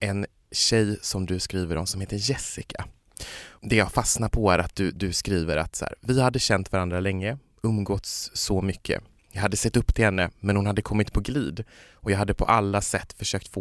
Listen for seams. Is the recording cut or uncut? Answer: uncut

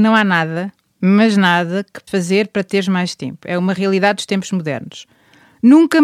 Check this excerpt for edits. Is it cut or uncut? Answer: cut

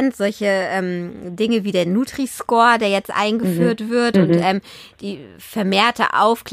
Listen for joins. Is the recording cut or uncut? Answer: uncut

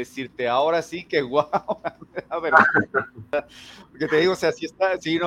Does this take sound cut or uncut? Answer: uncut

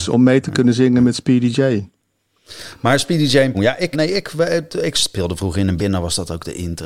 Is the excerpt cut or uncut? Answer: cut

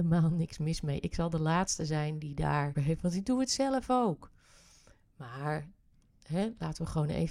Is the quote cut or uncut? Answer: cut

